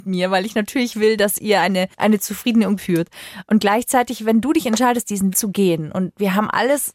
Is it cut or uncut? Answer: cut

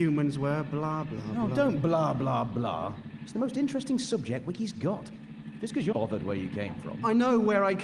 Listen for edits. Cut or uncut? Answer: cut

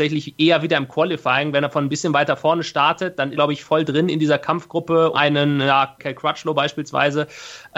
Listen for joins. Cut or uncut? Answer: cut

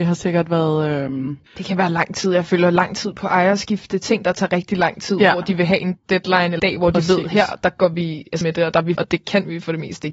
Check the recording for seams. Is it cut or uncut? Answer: cut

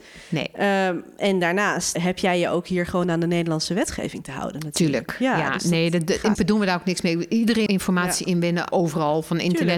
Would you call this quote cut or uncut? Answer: cut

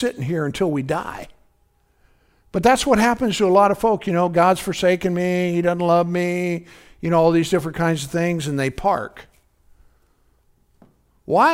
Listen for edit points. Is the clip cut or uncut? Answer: uncut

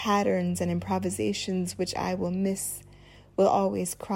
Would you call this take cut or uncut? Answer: uncut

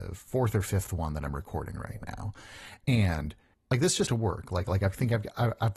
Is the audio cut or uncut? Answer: cut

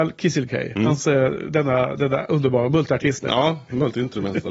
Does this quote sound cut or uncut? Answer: uncut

